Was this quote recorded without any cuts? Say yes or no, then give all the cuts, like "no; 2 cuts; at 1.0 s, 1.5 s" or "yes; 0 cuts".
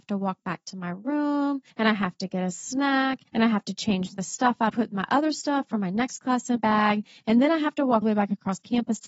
no; 5 cuts; at 1.7 s, 3.3 s, 4.7 s, 6.6 s, 8.0 s